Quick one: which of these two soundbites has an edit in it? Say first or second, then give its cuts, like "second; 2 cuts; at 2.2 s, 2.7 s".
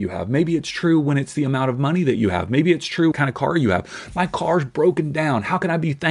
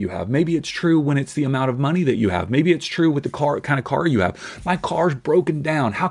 first; 1 cut; at 3.1 s